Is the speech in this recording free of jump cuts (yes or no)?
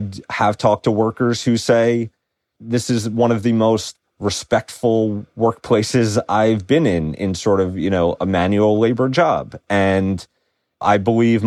yes